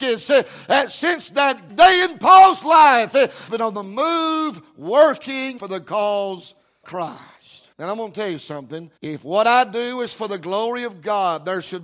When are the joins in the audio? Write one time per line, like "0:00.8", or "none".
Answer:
0:01.7
0:03.5
0:05.6
0:06.8
0:07.7
0:09.0